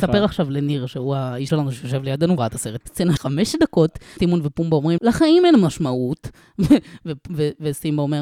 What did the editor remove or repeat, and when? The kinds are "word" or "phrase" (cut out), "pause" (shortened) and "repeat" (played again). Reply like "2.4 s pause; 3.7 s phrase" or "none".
1.5 s word; 2.4 s word; 2.8 s word; 3.2 s word; 4.2 s word; 5.0 s word